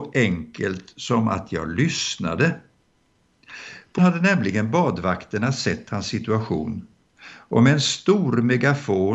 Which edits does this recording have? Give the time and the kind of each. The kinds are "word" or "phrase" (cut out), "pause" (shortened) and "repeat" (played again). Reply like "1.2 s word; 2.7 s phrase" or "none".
4.0 s word